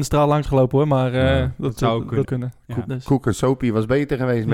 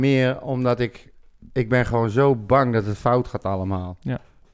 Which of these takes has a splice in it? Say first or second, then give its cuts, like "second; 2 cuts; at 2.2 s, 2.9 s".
first; 1 cut; at 2.2 s